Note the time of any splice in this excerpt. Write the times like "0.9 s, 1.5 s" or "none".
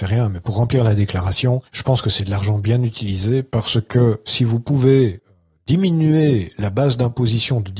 1.7 s